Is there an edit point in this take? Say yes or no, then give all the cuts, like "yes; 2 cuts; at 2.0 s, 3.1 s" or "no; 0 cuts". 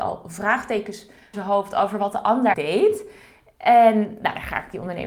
yes; 2 cuts; at 1.3 s, 2.5 s